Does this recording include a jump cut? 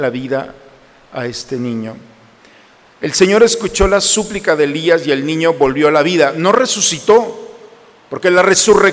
no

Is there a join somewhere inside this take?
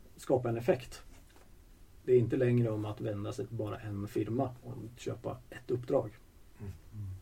no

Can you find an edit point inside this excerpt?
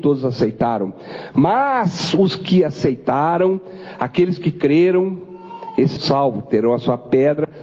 yes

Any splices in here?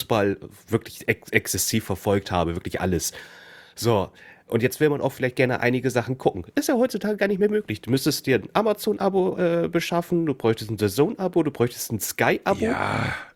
yes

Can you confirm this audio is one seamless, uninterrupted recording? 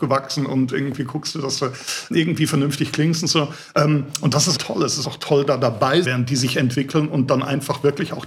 no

